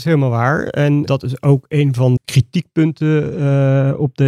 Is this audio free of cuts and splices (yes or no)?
no